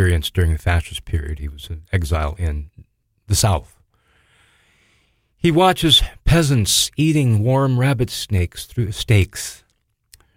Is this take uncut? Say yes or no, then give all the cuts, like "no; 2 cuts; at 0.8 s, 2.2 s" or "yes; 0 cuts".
yes; 0 cuts